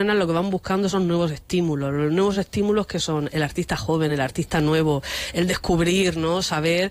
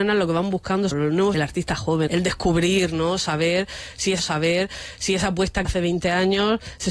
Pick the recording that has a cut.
second; 5 cuts; at 0.9 s, 1.3 s, 2.1 s, 4.2 s, 5.7 s

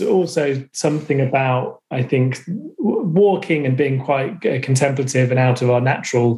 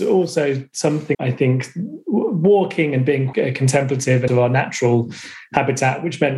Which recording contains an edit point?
second; 3 cuts; at 1.1 s, 3.3 s, 4.3 s

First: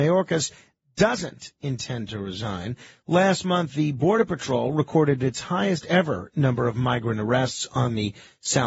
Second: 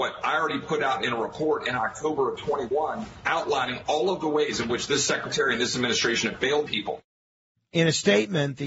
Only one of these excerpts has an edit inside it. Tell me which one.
second; 1 cut; at 6.7 s

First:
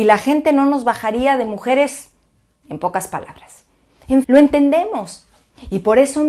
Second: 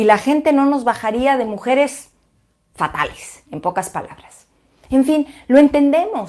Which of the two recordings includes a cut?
first; 2 cuts; at 2.6 s, 4.2 s

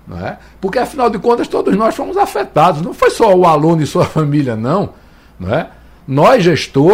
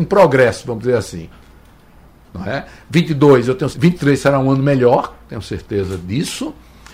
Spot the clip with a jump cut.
second; 1 cut; at 3.7 s

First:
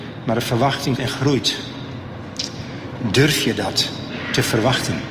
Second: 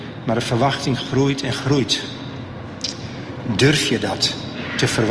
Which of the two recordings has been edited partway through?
first; 1 cut; at 1.0 s

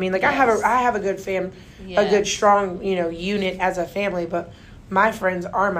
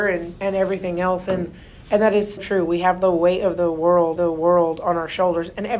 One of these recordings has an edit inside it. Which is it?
second; 2 cuts; at 2.4 s, 4.2 s

